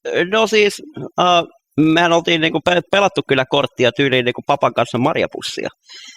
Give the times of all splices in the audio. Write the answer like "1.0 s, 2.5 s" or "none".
none

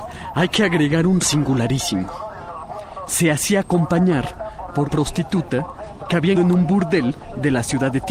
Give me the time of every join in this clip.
1.2 s, 4.8 s, 6.3 s

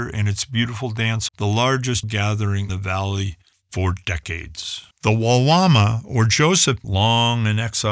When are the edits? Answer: 1.3 s, 2.0 s, 2.7 s, 3.5 s, 4.9 s, 6.8 s

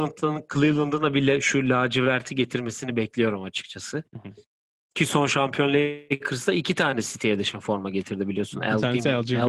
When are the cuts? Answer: none

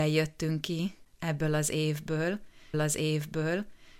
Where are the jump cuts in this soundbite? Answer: 2.7 s

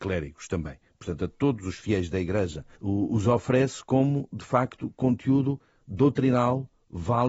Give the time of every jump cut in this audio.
2.7 s

